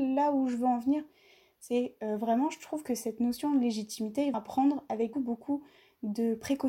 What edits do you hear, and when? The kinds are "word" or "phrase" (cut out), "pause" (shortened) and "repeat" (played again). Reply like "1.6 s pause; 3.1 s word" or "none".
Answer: 4.3 s word; 5.1 s word